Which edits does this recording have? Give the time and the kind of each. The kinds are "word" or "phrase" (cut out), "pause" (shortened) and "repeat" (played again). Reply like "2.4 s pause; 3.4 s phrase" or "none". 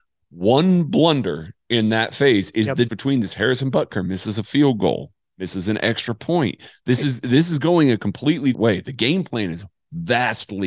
2.9 s word; 8.5 s word